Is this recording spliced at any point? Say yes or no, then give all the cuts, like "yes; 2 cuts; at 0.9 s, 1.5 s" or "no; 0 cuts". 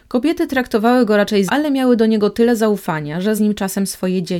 yes; 2 cuts; at 1.5 s, 3.4 s